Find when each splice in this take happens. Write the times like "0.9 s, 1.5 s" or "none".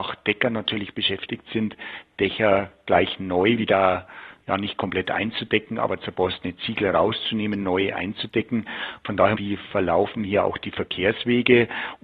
9.3 s